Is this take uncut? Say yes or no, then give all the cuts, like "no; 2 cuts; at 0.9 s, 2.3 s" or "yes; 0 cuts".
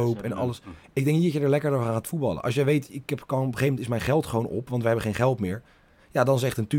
yes; 0 cuts